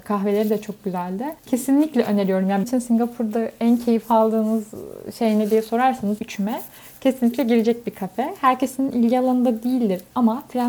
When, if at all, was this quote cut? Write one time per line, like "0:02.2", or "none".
0:01.4
0:02.6
0:06.2

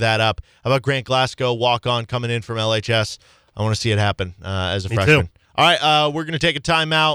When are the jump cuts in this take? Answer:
none

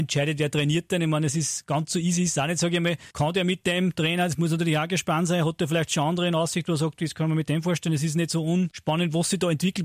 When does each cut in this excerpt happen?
0:03.1

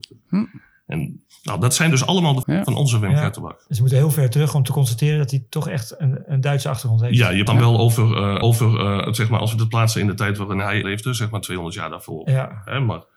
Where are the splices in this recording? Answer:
0:02.4
0:07.5
0:08.4
0:10.8

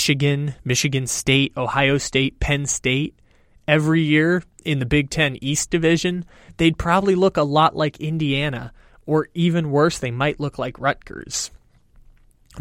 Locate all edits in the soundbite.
none

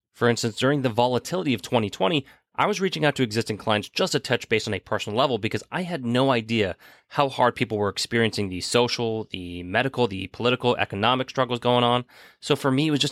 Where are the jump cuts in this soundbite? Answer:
none

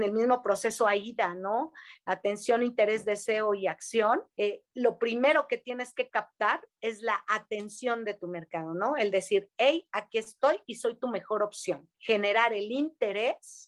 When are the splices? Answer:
0:04.3
0:11.9

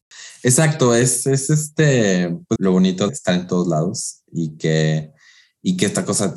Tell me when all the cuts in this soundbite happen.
0:02.6
0:03.1

